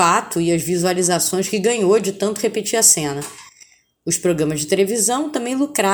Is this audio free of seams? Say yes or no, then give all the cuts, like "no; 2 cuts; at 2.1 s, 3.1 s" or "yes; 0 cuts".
yes; 0 cuts